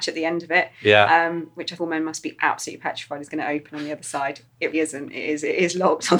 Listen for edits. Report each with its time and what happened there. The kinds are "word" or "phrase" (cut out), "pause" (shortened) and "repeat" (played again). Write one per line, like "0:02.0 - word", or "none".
0:01.8 - word
0:04.7 - word